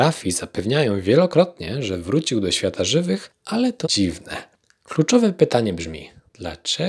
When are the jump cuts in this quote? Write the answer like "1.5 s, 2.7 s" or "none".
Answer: 3.8 s